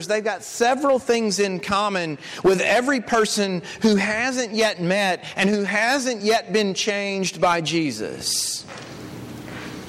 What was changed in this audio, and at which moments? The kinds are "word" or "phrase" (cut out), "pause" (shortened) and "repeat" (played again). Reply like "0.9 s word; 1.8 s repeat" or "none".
none

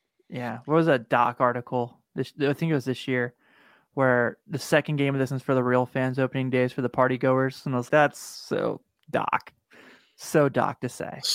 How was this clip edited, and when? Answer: 5.3 s word; 7.9 s word

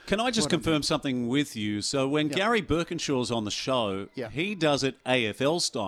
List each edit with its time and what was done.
none

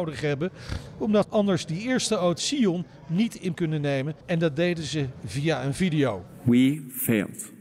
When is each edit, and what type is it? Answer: 1.2 s word; 2.4 s word; 3.6 s word; 4.2 s pause

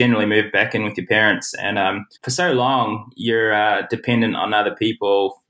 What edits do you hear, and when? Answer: 2.1 s pause

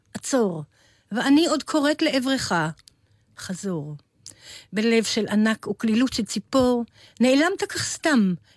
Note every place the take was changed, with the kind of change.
none

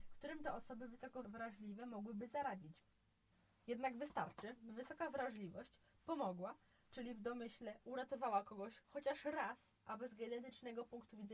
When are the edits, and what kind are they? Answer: none

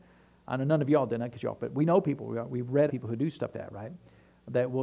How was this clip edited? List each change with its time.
1.6 s word; 2.9 s word; 3.5 s word

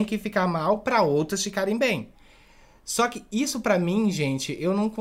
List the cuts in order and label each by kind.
none

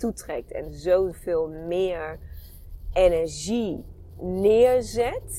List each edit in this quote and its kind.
1.1 s word

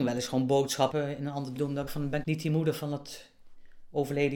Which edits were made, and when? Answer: 0.9 s phrase; 1.6 s word; 1.9 s word; 2.2 s word

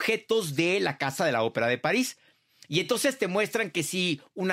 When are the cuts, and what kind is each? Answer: none

